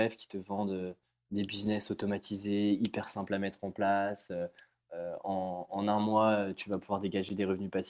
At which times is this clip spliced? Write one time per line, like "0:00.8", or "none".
none